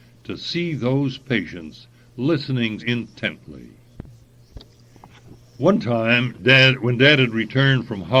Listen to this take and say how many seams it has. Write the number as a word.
one